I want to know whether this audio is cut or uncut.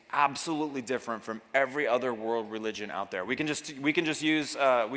uncut